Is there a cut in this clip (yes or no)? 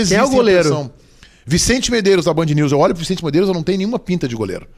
no